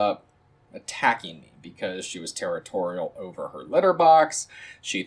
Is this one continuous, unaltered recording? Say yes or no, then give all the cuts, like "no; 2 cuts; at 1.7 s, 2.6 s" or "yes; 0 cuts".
yes; 0 cuts